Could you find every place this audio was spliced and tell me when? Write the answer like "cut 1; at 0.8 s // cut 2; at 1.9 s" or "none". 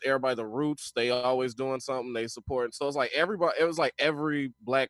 none